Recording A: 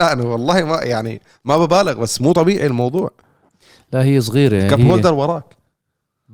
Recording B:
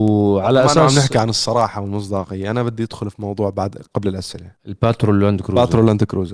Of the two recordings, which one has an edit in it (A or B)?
B